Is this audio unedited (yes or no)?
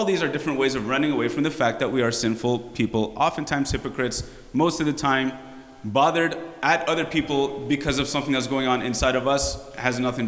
yes